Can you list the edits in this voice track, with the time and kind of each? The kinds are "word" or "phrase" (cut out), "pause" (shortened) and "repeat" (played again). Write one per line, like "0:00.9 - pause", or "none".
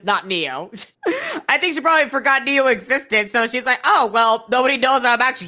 0:00.9 - pause